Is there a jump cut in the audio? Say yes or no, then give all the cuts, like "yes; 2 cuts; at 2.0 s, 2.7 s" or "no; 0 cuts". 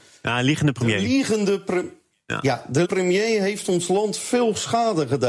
yes; 1 cut; at 2.8 s